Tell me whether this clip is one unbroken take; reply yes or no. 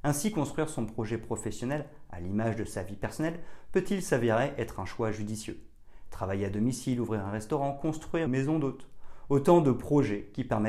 no